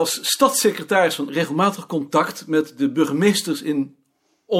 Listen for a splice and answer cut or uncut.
cut